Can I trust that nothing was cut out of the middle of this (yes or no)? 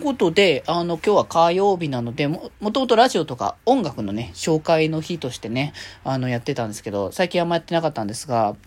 yes